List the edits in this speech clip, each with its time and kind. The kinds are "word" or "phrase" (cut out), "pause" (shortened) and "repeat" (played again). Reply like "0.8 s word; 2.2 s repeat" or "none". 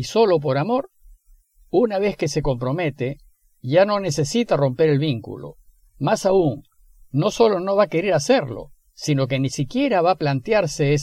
none